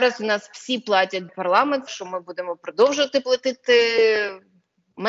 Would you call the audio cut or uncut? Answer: cut